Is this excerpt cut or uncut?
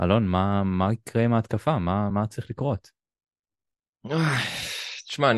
uncut